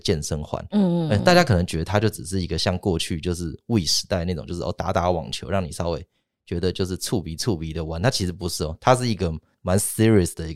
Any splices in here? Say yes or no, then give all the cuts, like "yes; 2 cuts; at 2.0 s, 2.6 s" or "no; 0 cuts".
no; 0 cuts